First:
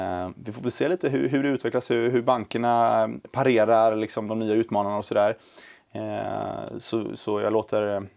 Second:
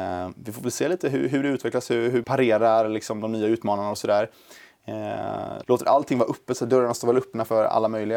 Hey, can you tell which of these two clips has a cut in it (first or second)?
second